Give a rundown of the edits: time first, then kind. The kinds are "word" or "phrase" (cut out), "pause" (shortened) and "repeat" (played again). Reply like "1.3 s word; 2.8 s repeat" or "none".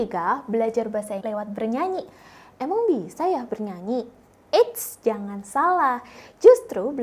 1.2 s word; 3.5 s phrase; 4.3 s pause